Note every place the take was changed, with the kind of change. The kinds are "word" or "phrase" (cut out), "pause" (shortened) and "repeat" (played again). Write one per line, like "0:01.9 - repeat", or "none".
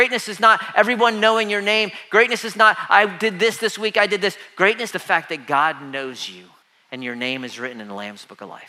0:04.9 - word
0:06.6 - pause

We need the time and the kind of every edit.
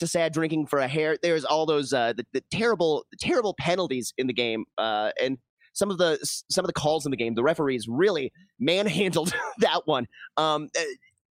none

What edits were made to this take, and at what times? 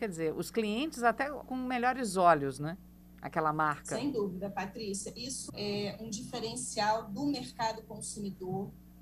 0:01.4 - word
0:05.5 - word

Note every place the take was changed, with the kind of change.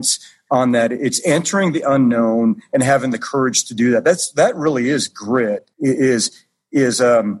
0:05.7 - pause

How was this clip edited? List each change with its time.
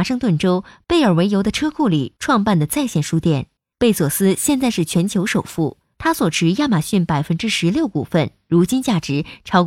0:03.6 - pause

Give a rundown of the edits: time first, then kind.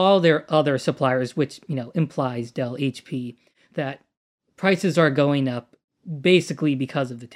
none

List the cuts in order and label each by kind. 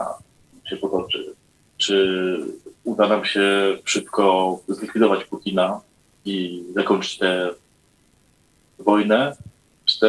none

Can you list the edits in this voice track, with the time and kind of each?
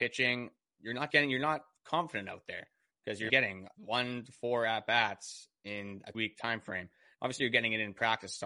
0:01.1 - word
0:03.3 - word
0:03.7 - pause
0:06.1 - word

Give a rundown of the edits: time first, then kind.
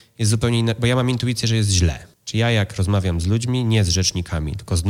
0:02.1 - pause

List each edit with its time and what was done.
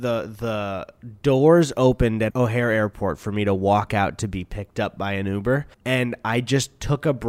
0:02.3 - word
0:05.7 - pause

